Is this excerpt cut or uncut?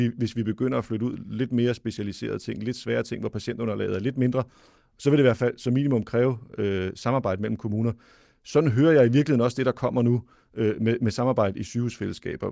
uncut